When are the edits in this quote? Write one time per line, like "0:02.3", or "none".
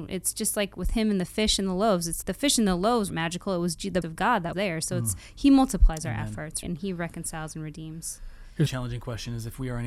0:02.2
0:03.1
0:04.0
0:04.5
0:06.6
0:08.7